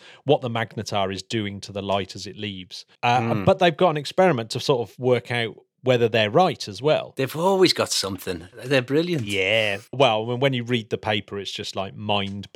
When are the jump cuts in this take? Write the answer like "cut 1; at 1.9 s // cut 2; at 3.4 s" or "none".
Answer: cut 1; at 2.9 s // cut 2; at 8.5 s // cut 3; at 9.9 s